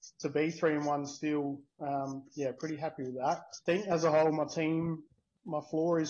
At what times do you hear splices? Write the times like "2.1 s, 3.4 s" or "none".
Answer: none